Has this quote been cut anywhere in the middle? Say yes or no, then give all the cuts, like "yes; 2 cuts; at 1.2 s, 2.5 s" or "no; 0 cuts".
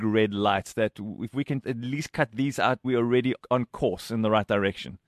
yes; 3 cuts; at 1.6 s, 2.8 s, 3.4 s